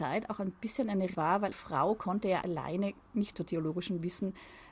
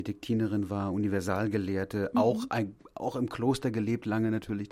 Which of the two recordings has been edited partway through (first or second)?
first